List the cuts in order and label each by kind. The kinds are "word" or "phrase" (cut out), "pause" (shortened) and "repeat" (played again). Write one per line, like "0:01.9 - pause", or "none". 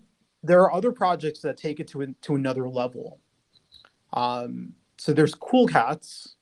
none